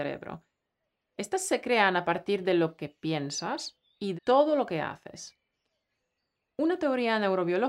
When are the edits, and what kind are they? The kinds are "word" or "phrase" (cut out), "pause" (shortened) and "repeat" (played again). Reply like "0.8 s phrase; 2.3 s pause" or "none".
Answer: 4.1 s word